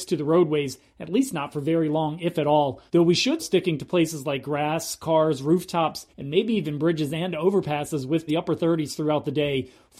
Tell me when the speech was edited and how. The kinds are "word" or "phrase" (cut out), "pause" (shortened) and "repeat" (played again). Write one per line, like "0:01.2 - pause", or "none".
0:02.9 - pause
0:03.4 - phrase
0:06.1 - pause
0:08.3 - phrase